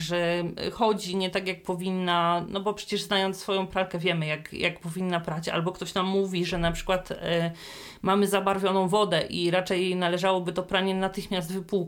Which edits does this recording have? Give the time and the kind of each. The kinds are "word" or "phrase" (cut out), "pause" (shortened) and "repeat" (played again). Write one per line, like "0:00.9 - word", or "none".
none